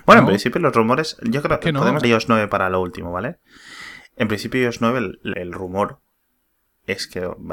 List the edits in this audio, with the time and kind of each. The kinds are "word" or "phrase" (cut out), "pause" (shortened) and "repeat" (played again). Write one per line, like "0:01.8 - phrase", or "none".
0:02.0 - word
0:05.3 - word